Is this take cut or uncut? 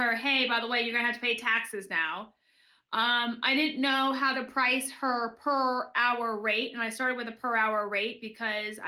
uncut